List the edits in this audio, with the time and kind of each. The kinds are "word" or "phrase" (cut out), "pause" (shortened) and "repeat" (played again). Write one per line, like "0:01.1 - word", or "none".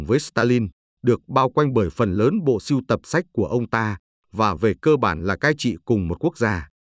none